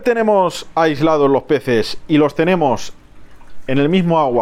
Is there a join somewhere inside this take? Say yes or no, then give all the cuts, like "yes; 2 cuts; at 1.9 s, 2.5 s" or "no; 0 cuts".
no; 0 cuts